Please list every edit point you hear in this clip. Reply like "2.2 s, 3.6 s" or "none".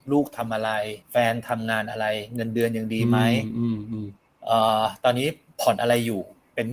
1.0 s